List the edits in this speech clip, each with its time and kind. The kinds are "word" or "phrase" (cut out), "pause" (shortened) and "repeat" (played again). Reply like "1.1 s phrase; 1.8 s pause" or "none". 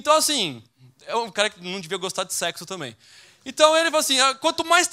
none